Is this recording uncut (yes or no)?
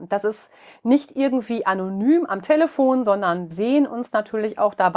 no